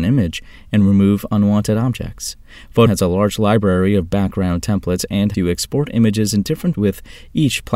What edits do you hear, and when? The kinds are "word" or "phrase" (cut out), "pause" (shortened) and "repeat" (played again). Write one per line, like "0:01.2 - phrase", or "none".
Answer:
0:02.9 - word
0:05.3 - word
0:06.7 - word